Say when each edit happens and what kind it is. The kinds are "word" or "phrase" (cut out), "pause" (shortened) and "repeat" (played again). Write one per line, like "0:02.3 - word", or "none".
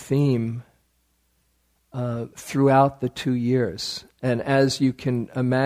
0:02.3 - pause